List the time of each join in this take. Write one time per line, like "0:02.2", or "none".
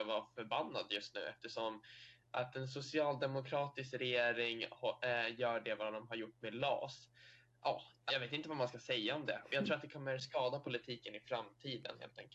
0:02.2
0:08.1